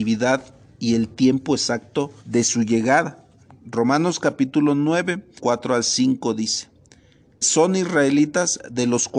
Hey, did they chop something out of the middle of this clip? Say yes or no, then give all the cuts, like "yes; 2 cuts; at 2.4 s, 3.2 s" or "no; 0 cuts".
yes; 3 cuts; at 2.2 s, 5.4 s, 7.4 s